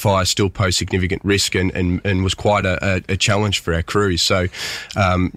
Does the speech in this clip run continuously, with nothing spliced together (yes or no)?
yes